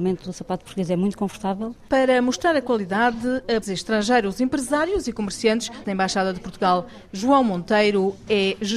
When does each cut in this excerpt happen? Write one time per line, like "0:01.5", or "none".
0:03.6
0:05.8